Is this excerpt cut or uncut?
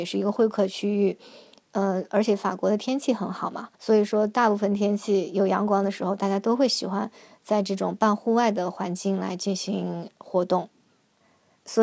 cut